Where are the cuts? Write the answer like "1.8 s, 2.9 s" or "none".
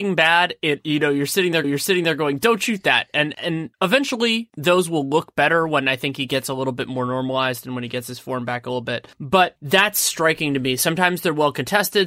1.6 s, 3.3 s